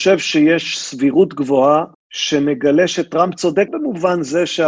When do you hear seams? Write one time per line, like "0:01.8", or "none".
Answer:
0:01.9
0:03.7